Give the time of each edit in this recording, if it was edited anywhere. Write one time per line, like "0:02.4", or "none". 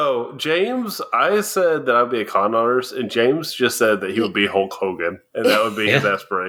none